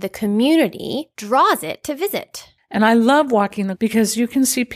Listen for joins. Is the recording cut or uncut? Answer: cut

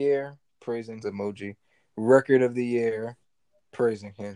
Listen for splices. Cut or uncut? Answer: cut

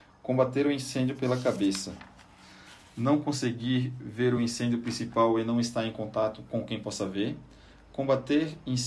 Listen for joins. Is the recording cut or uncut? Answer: uncut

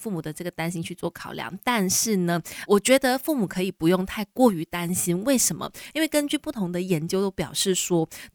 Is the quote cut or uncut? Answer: cut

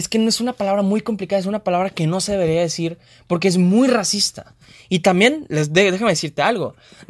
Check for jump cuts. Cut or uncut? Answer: uncut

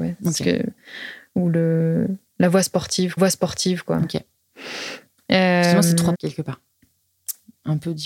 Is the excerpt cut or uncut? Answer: cut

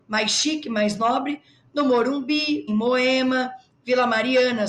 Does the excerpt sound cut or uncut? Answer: cut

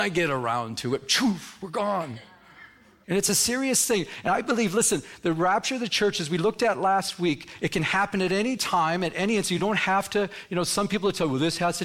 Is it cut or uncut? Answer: uncut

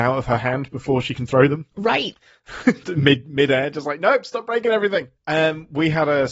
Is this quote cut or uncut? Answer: cut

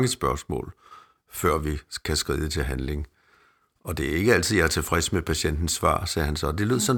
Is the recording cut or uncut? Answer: uncut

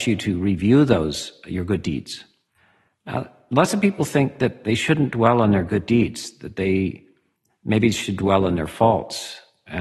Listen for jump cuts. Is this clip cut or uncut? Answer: uncut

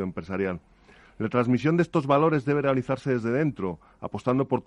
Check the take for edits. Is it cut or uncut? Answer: uncut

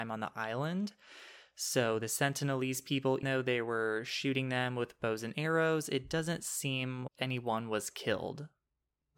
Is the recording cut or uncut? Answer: cut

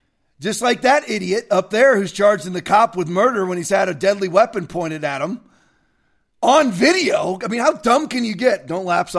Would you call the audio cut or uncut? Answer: uncut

